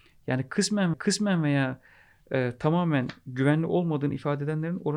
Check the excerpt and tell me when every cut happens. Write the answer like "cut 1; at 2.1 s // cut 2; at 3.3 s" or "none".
cut 1; at 0.9 s